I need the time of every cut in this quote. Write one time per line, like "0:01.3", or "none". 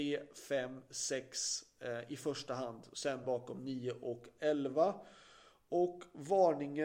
0:03.2